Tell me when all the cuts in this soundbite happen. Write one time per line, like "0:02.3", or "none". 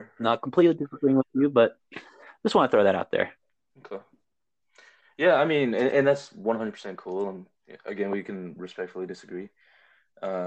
none